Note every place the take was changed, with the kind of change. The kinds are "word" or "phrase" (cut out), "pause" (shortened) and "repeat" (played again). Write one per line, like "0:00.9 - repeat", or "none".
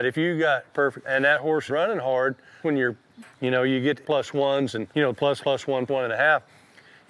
0:01.0 - word
0:01.7 - word
0:02.6 - word
0:03.3 - pause
0:04.0 - phrase
0:04.9 - pause
0:05.4 - word
0:05.9 - word